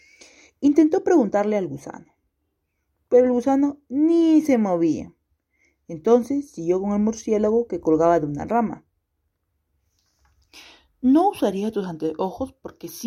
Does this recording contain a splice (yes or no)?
no